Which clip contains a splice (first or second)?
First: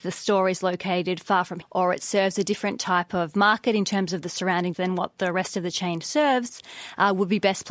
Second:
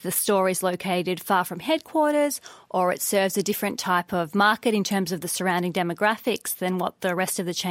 first